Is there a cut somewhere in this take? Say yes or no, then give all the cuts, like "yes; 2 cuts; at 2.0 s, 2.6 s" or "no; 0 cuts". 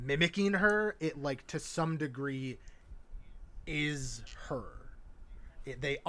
no; 0 cuts